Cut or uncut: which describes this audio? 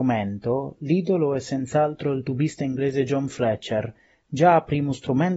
uncut